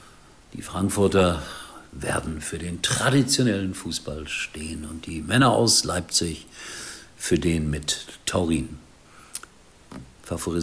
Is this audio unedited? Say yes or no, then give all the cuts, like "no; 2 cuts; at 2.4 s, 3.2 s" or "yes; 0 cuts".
yes; 0 cuts